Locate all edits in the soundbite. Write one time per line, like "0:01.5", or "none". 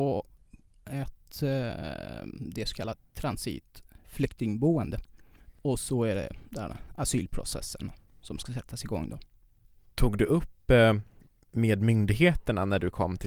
0:08.1
0:09.6

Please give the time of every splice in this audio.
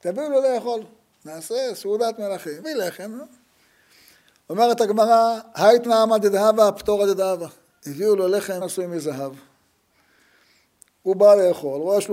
0:02.6
0:05.8
0:08.6

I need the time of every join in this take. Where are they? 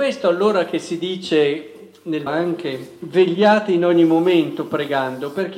0:02.3

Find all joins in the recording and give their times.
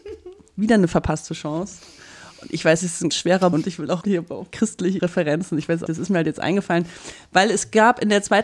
0:02.8
0:03.1
0:03.5
0:04.0
0:04.5
0:05.0
0:05.9

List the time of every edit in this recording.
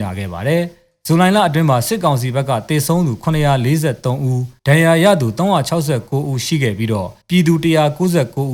0:04.6
0:07.2

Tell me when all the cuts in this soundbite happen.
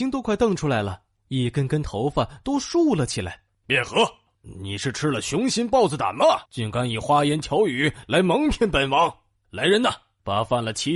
0:06.5

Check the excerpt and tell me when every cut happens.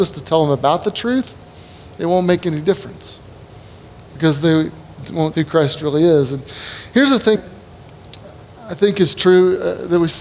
0:05.3
0:07.4

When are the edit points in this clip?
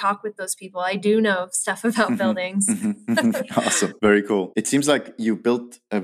none

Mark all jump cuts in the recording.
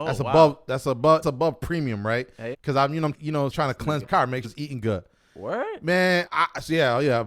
0:01.2
0:02.5
0:03.1
0:03.5
0:04.0
0:04.4
0:06.3

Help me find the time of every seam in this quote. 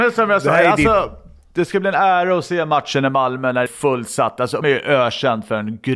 0:03.7
0:04.6

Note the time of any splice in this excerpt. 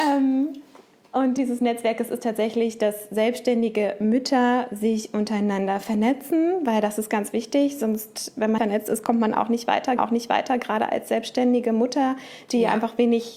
0:01.4
0:08.6
0:10.0

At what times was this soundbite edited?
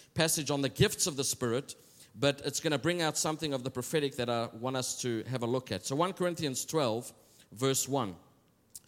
none

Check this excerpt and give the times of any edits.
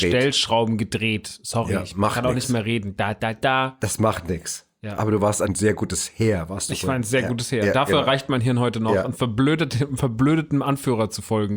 none

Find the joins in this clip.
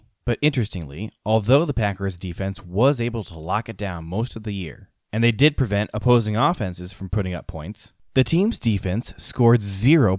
none

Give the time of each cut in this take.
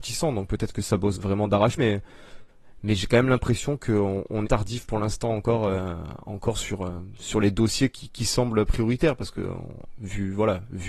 0:01.1
0:01.8
0:04.4

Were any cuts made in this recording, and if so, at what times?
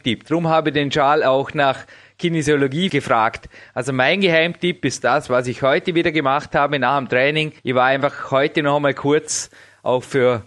0:07.6

